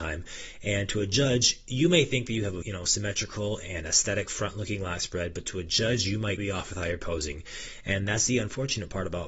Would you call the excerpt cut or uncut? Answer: cut